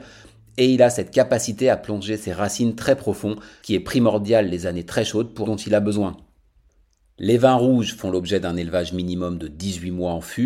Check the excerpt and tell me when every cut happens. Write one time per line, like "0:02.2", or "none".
0:03.6
0:05.4